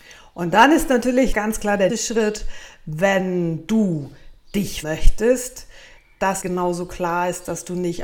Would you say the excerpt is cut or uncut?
cut